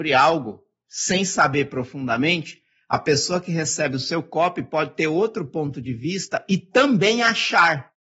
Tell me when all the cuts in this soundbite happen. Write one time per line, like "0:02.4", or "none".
none

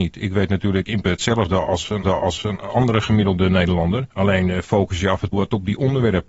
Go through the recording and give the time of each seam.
0:01.0
0:02.0
0:04.1
0:05.3

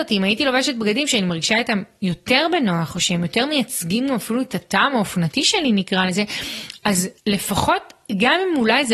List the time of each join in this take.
0:07.2

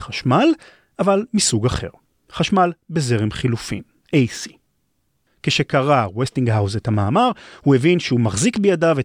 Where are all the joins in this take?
none

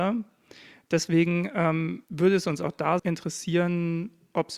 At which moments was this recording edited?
0:02.0
0:03.0

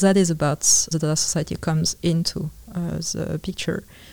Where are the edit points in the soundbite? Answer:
0:00.9

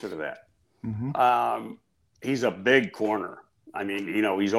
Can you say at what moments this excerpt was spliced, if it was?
none

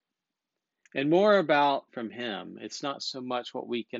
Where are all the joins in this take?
0:01.9

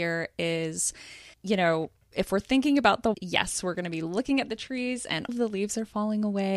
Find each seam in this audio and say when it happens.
0:01.3
0:03.1
0:05.3

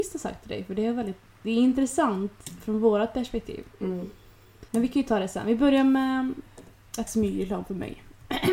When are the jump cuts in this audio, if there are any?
0:04.7
0:07.1

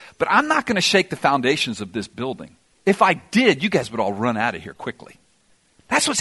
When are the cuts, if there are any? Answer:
0:02.7

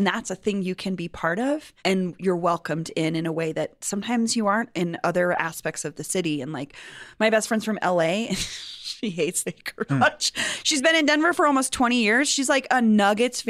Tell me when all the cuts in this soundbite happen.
0:01.8
0:09.4
0:09.9

